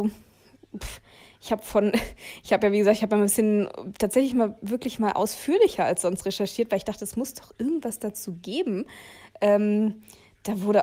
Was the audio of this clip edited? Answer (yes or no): no